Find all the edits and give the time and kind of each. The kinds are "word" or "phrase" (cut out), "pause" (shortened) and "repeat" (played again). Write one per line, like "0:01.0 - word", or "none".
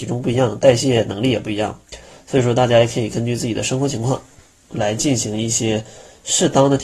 none